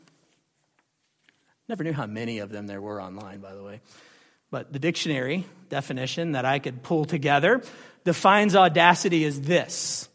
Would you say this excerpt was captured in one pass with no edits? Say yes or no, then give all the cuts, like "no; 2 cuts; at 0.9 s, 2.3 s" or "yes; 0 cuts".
yes; 0 cuts